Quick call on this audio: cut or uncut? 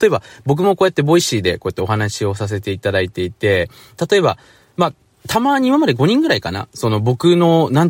cut